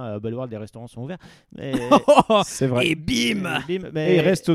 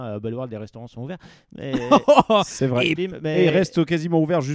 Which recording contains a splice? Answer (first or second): second